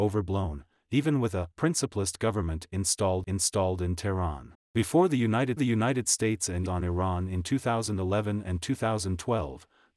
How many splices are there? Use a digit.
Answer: 5